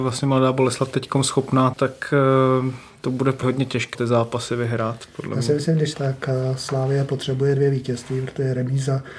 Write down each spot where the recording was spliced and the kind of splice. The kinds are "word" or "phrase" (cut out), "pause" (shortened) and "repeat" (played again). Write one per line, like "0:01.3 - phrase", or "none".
0:01.7 - word
0:03.4 - word
0:03.9 - word
0:05.9 - phrase